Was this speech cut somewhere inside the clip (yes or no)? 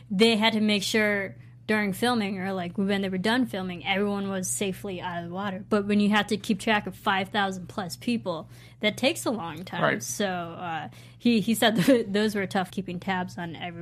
yes